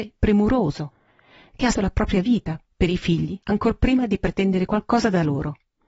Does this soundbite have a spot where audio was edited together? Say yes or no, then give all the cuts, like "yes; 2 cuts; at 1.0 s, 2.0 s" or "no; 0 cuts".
yes; 2 cuts; at 1.7 s, 3.4 s